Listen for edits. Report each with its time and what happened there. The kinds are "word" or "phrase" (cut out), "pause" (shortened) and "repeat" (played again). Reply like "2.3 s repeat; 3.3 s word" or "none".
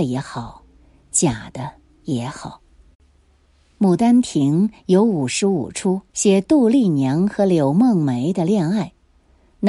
6.1 s pause